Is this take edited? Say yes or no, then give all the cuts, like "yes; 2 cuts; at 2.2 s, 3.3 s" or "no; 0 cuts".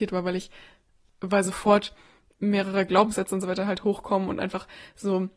no; 0 cuts